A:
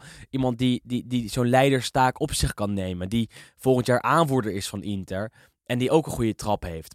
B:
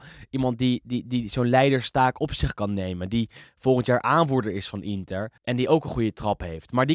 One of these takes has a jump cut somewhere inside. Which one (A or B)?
B